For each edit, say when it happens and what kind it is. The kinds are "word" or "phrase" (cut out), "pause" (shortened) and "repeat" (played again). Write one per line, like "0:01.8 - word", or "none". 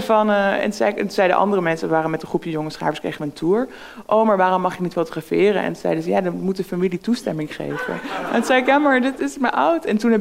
none

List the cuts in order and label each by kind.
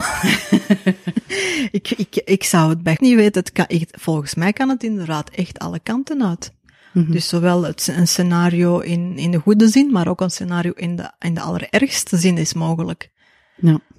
0:03.0 - word

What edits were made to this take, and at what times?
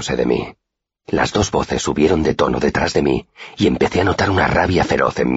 none

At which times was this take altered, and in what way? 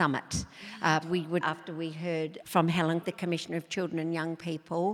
0:01.0 - word
0:01.4 - word
0:02.4 - word
0:03.0 - word

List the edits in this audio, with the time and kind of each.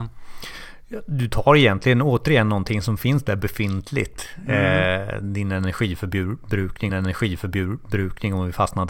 0:06.9 - repeat

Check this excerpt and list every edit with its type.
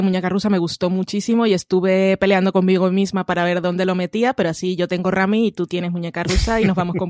none

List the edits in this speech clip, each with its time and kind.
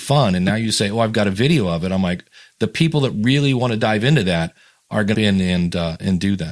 0:05.1 - phrase

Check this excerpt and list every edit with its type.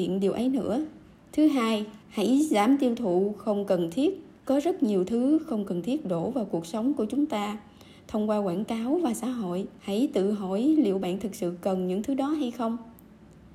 0:01.1 - pause
0:02.0 - pause
0:04.4 - pause
0:09.8 - pause

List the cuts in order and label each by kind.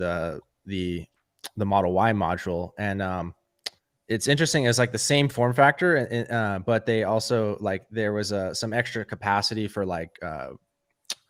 0:03.8 - pause

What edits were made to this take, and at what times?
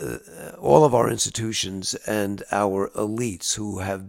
none

